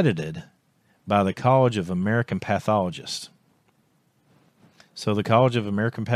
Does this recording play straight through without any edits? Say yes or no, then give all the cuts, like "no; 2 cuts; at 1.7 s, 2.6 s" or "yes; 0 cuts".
yes; 0 cuts